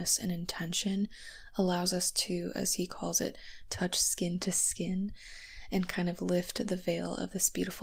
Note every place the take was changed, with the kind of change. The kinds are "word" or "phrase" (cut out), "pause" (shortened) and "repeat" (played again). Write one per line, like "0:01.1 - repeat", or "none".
none